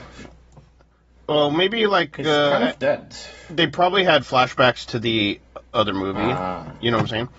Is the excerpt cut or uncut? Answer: uncut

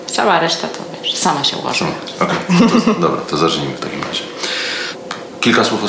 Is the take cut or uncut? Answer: uncut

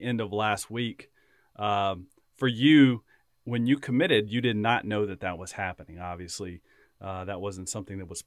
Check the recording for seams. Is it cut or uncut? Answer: uncut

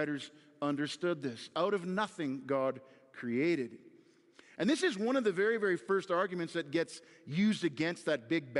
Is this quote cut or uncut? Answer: uncut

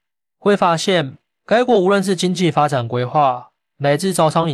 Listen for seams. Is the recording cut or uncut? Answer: uncut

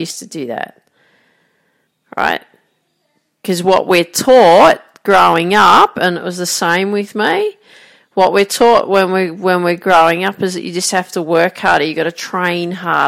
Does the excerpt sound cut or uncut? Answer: uncut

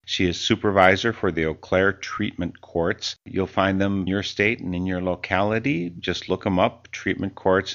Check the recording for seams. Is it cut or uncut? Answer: cut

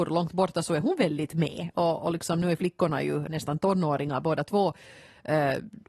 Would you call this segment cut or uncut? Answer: cut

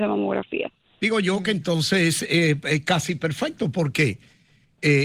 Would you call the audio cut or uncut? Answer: uncut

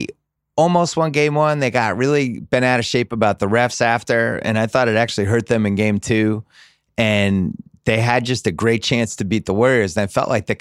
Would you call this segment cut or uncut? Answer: uncut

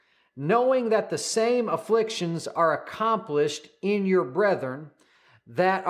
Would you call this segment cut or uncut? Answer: uncut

